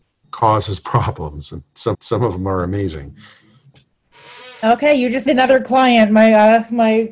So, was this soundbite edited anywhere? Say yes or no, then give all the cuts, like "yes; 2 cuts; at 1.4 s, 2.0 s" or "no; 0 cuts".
yes; 2 cuts; at 1.9 s, 5.3 s